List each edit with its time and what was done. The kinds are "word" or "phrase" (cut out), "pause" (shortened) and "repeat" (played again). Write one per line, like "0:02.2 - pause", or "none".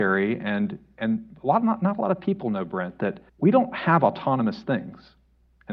0:03.3 - pause